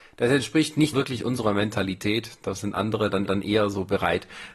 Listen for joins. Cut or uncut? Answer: cut